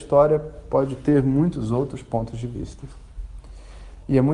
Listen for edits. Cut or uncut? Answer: uncut